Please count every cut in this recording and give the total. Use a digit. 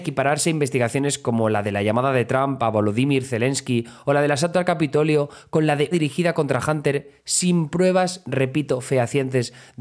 1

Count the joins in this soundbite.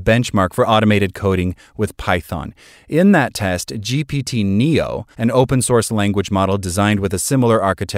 1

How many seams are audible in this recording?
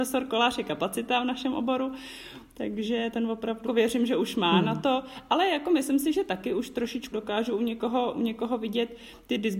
3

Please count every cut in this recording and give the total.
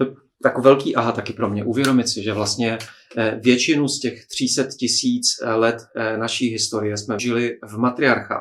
1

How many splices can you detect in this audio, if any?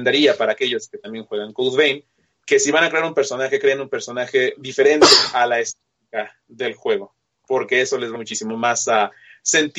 1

